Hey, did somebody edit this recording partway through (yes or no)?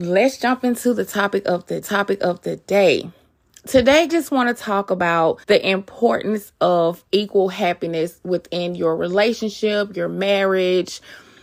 yes